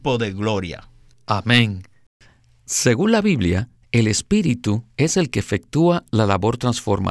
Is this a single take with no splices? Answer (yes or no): no